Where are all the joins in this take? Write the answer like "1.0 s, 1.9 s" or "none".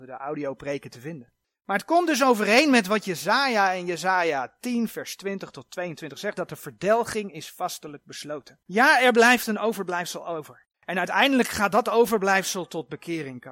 1.4 s, 8.6 s, 10.7 s